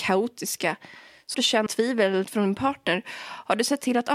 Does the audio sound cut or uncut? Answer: cut